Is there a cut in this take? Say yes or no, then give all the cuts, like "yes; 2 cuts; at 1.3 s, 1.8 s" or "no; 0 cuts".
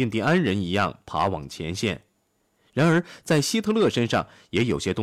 no; 0 cuts